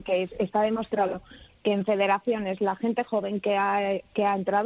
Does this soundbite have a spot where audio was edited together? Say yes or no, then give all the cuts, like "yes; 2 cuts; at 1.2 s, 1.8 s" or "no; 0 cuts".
no; 0 cuts